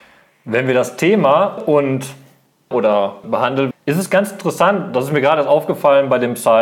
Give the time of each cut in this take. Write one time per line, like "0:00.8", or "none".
0:01.6
0:02.7
0:03.2
0:03.7